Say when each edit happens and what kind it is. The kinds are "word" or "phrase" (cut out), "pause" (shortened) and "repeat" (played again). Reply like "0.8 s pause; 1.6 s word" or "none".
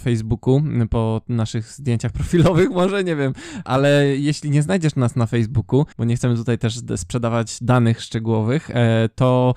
5.9 s pause